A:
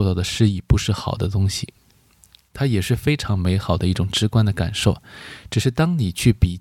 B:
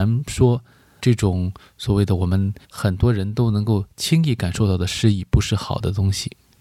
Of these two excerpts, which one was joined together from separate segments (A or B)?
B